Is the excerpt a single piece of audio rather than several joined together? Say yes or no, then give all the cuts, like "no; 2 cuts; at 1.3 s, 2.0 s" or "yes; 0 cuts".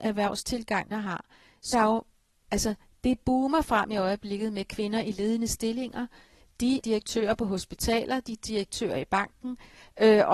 no; 3 cuts; at 0.9 s, 1.7 s, 6.8 s